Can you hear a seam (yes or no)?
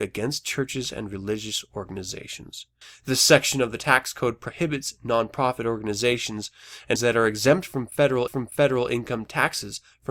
yes